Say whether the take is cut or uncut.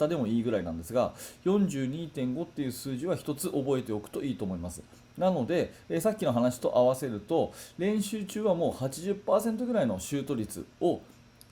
uncut